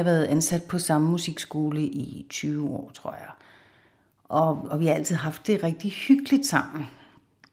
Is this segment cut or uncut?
uncut